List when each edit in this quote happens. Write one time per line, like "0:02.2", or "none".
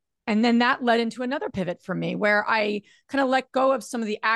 none